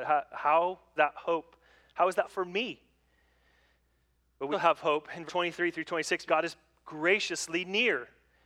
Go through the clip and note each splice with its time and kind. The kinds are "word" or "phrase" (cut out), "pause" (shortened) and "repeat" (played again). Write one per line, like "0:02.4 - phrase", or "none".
0:01.0 - word
0:02.2 - word
0:04.5 - word
0:05.3 - word
0:06.3 - word